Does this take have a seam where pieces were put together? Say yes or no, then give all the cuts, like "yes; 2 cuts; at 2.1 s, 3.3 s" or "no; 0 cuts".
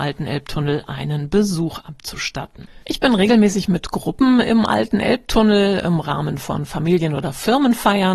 yes; 1 cut; at 2.8 s